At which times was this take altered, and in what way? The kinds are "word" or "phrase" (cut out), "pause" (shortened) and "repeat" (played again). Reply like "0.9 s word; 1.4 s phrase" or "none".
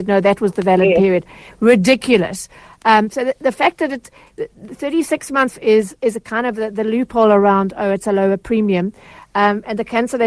5.5 s phrase

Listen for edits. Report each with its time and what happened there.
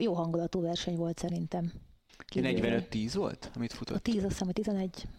none

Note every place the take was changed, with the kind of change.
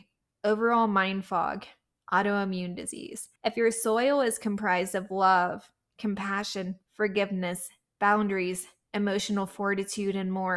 3.4 s pause

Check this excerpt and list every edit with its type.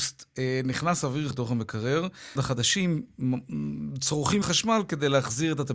1.3 s word; 2.4 s phrase; 4.4 s word

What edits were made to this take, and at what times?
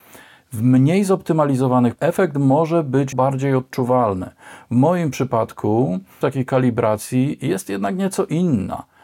2.0 s word; 3.1 s word; 6.2 s word

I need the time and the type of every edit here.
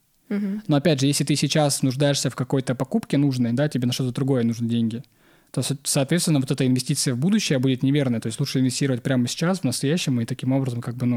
none

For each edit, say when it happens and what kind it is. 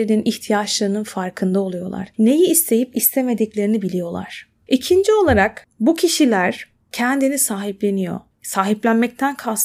none

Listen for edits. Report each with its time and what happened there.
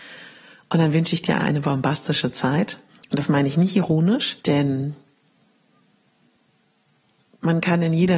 1.4 s word; 2.9 s pause; 4.4 s pause

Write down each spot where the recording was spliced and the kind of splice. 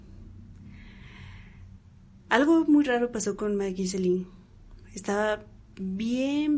none

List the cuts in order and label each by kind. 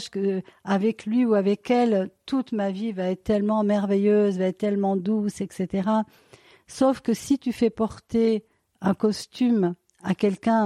none

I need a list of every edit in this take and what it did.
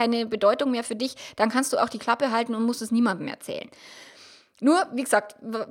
none

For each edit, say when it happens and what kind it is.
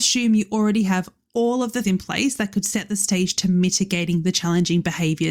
1.8 s word

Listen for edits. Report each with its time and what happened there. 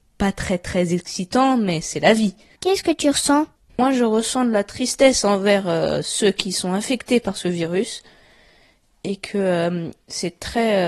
none

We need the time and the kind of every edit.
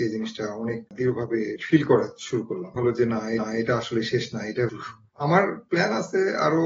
2.8 s phrase; 3.4 s repeat; 4.7 s word

